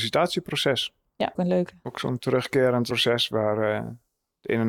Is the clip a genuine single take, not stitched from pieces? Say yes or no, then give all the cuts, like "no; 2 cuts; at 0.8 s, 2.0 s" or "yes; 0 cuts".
no; 1 cut; at 1.3 s